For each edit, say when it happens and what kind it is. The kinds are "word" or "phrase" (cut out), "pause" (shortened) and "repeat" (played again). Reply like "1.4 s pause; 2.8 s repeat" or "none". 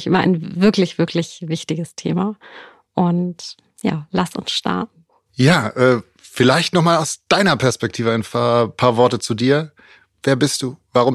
none